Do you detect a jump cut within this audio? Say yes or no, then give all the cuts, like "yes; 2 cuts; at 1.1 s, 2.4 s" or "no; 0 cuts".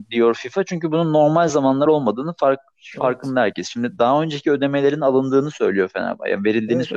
no; 0 cuts